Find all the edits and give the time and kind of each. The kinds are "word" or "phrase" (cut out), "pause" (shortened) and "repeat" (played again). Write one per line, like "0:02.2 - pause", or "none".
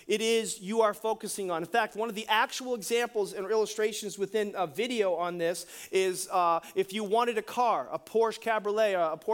none